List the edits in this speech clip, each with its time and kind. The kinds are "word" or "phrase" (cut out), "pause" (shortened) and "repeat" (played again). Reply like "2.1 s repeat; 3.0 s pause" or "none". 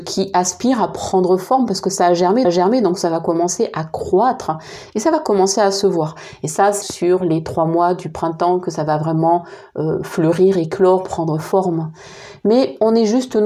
2.4 s repeat; 6.8 s word